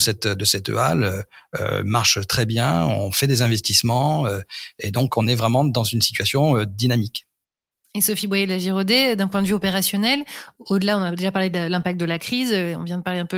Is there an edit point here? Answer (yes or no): no